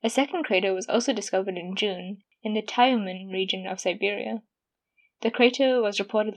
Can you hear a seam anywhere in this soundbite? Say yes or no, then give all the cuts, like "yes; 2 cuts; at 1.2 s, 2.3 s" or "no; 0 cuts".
no; 0 cuts